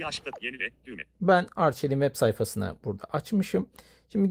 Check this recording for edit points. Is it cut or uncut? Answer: uncut